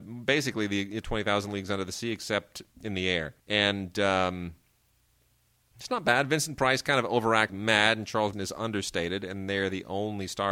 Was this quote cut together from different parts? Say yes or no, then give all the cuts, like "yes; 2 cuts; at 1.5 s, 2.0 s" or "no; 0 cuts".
yes; 5 cuts; at 1.0 s, 2.7 s, 3.4 s, 7.5 s, 8.3 s